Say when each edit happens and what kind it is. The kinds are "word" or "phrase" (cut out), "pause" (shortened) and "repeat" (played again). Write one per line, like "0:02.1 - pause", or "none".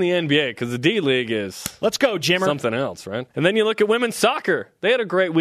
0:03.3 - pause